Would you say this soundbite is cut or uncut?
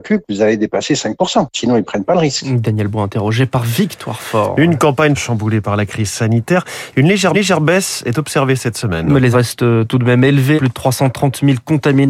cut